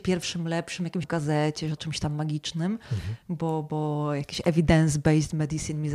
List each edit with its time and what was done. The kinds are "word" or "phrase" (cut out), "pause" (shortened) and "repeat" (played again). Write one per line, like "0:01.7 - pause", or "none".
0:01.0 - word
0:01.8 - phrase